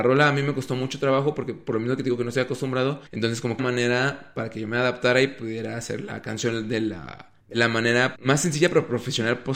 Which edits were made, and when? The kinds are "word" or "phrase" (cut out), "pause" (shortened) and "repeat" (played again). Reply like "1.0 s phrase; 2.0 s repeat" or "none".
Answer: 3.1 s pause; 3.6 s phrase; 7.4 s pause; 8.1 s word